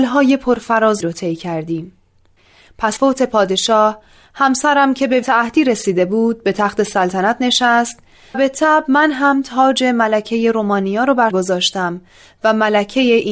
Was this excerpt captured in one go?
no; 5 cuts; at 1.0 s, 3.0 s, 5.2 s, 8.3 s, 11.3 s

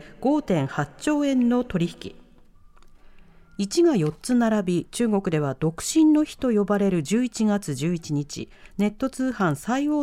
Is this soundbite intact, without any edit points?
yes; 0 cuts

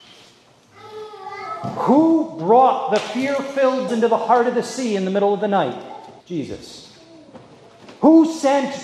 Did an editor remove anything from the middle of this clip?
yes; 2 cuts; at 3.9 s, 6.2 s

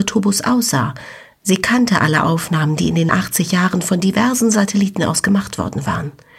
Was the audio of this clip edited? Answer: yes; 1 cut; at 3.1 s

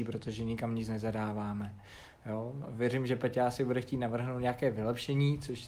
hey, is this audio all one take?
yes; 0 cuts

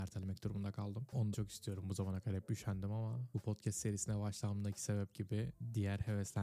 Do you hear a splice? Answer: yes; 1 cut; at 1.3 s

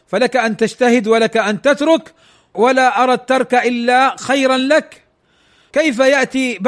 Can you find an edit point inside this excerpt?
no; 0 cuts

